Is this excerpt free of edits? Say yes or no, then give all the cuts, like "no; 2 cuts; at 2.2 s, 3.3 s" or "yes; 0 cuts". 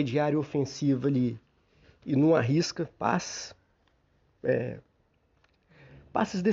yes; 0 cuts